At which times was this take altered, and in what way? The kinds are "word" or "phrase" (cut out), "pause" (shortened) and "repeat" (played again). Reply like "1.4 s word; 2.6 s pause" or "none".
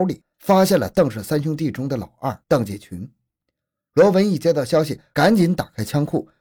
2.4 s pause